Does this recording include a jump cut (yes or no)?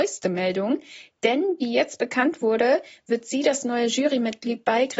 no